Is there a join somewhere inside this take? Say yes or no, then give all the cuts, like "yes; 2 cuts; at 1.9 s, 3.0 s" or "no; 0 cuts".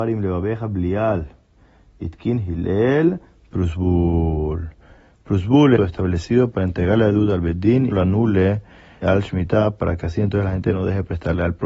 yes; 3 cuts; at 5.8 s, 7.9 s, 9.0 s